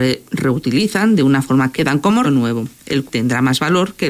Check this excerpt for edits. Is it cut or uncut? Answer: cut